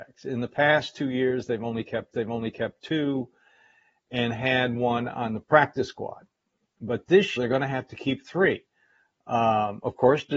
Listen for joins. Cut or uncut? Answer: cut